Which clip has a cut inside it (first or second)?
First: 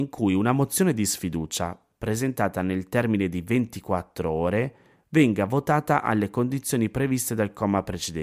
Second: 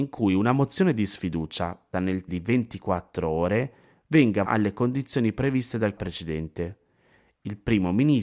second